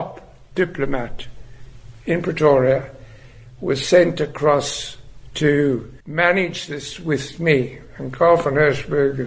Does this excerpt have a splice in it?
yes; 1 cut; at 6.0 s

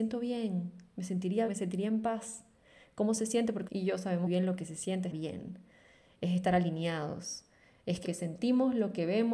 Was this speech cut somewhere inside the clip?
yes; 5 cuts; at 1.5 s, 3.7 s, 4.3 s, 5.1 s, 8.0 s

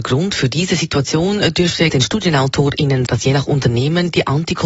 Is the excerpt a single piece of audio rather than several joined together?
no; 2 cuts; at 1.9 s, 3.1 s

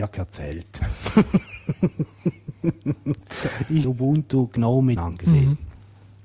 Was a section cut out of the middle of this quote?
yes; 2 cuts; at 3.8 s, 5.0 s

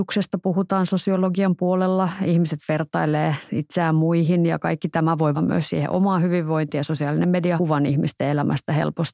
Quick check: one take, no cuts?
no; 2 cuts; at 5.3 s, 7.6 s

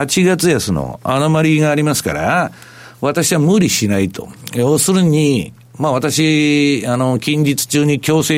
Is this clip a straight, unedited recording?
yes; 0 cuts

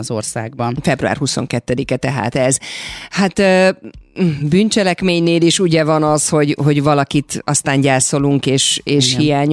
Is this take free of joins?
yes; 0 cuts

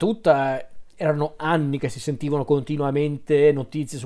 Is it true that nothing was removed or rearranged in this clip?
yes; 0 cuts

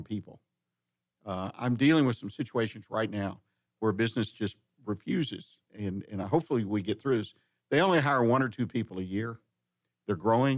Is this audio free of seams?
yes; 0 cuts

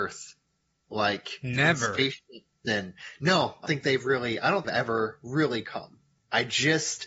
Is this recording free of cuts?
no; 2 cuts; at 3.7 s, 4.6 s

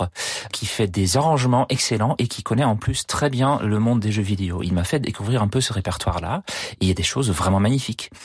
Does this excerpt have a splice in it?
no; 0 cuts

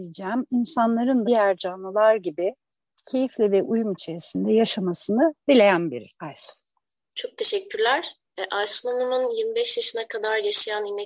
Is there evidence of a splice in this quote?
yes; 3 cuts; at 1.2 s, 6.1 s, 8.2 s

